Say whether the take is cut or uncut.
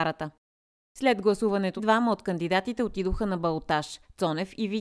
cut